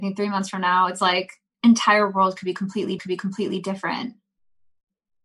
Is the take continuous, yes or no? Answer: no